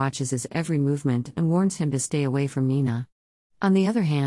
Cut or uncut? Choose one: uncut